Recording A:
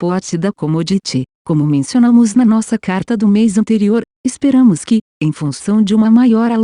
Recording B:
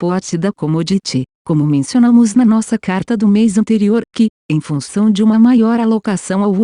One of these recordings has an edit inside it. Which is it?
B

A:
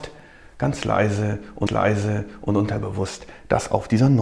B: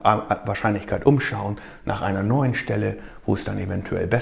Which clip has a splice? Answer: A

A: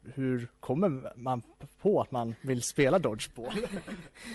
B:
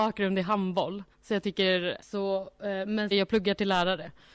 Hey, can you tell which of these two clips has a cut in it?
B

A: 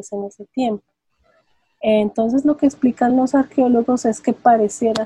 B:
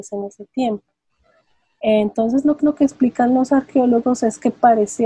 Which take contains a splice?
B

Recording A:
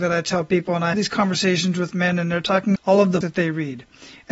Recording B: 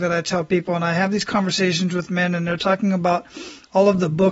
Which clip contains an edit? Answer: A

